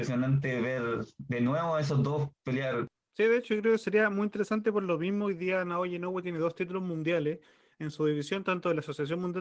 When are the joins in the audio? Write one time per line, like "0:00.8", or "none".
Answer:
none